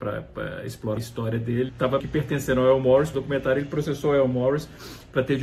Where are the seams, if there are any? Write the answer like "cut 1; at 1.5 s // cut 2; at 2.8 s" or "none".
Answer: cut 1; at 1.0 s // cut 2; at 1.7 s // cut 3; at 2.0 s // cut 4; at 3.1 s